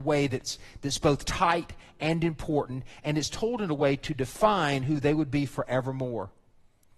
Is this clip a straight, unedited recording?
yes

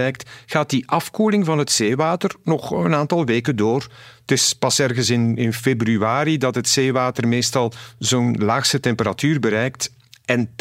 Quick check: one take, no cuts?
yes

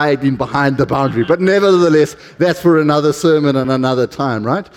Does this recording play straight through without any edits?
yes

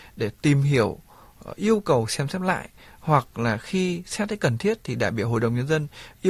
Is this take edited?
no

